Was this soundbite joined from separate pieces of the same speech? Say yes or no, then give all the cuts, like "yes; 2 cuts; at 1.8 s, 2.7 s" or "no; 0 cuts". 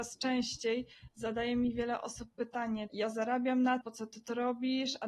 yes; 2 cuts; at 2.9 s, 3.8 s